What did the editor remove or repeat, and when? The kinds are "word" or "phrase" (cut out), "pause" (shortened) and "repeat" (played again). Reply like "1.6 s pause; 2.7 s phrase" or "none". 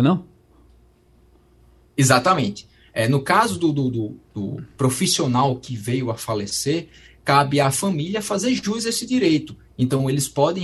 none